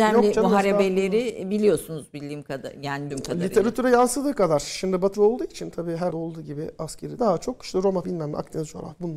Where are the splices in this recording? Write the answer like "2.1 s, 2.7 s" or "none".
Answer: 3.1 s, 5.1 s, 6.1 s, 7.2 s, 8.0 s